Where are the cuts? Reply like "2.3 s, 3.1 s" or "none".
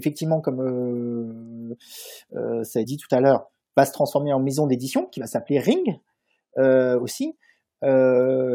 2.8 s